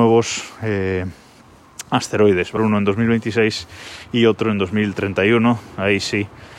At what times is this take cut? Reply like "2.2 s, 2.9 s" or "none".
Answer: 2.6 s

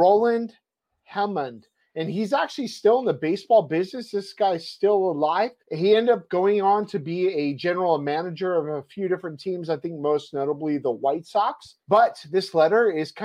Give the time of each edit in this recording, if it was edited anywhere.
5.6 s, 11.8 s

